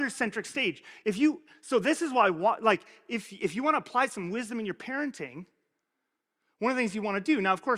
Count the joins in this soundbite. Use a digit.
0